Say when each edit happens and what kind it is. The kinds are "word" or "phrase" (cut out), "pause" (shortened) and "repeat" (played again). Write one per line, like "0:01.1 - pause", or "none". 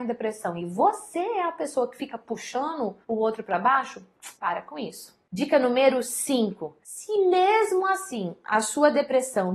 0:03.0 - pause
0:04.3 - pause